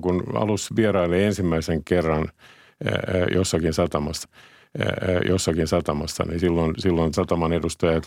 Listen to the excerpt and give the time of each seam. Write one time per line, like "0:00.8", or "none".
0:04.2
0:07.1